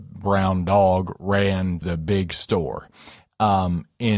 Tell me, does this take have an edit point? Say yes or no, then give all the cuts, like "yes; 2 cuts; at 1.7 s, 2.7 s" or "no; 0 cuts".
yes; 1 cut; at 1.8 s